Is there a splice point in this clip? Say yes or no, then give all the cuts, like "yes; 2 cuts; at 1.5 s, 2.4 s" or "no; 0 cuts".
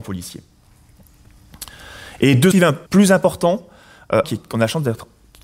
yes; 3 cuts; at 2.5 s, 2.9 s, 4.2 s